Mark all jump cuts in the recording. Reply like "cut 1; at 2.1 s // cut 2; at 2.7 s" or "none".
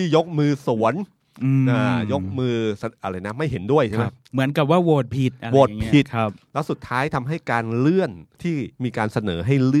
cut 1; at 8.3 s // cut 2; at 8.7 s